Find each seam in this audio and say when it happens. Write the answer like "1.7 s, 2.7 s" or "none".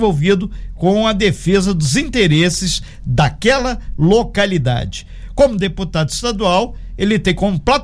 none